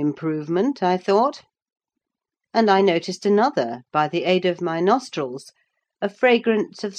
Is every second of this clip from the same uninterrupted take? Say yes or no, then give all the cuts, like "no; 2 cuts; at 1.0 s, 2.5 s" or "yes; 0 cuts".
yes; 0 cuts